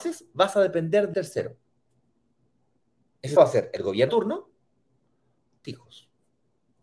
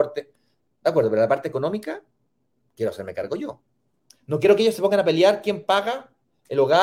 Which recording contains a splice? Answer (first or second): first